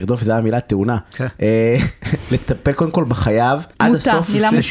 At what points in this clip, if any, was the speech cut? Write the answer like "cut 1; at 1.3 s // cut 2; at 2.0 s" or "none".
cut 1; at 3.7 s